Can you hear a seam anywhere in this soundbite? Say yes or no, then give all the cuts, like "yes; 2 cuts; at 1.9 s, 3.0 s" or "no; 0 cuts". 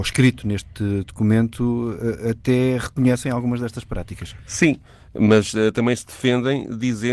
no; 0 cuts